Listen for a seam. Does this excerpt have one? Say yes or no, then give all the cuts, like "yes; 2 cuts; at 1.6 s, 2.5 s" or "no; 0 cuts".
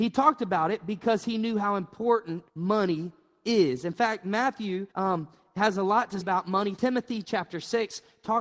yes; 4 cuts; at 2.5 s, 4.9 s, 6.2 s, 6.8 s